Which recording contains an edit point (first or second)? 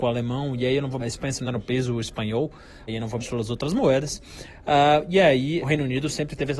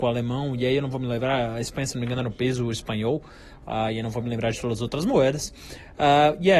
first